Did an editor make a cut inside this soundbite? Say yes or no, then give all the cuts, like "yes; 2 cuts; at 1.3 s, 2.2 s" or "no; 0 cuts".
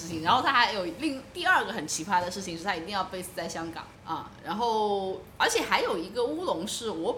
yes; 1 cut; at 3.9 s